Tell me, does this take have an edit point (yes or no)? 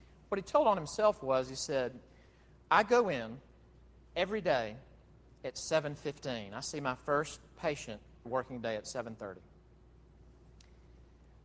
yes